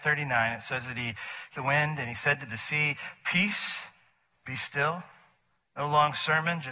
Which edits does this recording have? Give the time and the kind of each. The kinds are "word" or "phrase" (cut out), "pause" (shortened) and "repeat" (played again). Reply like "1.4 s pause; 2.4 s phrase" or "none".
1.5 s phrase